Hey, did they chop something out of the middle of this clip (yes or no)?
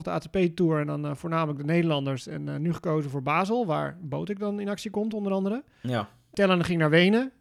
no